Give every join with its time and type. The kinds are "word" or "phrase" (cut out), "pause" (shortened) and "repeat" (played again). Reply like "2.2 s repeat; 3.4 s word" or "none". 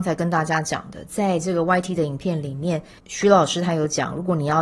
3.0 s pause